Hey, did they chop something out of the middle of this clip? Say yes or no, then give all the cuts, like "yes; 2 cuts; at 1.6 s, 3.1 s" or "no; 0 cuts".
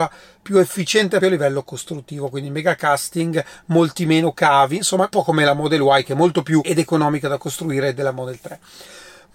yes; 3 cuts; at 1.2 s, 5.1 s, 6.6 s